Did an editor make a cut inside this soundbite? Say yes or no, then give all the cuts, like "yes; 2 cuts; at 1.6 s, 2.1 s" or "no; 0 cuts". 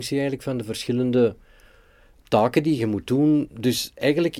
no; 0 cuts